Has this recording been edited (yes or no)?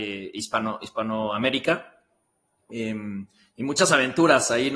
no